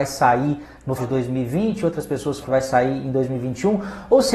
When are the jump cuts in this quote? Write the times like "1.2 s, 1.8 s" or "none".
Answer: 1.0 s, 2.4 s